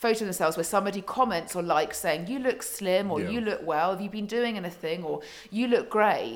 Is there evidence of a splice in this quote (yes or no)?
no